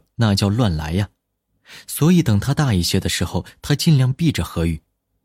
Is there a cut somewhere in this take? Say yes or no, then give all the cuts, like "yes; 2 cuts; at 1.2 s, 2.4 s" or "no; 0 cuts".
no; 0 cuts